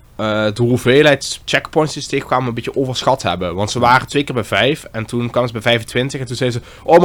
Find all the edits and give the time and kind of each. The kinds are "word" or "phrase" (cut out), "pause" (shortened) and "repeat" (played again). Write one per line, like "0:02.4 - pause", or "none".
none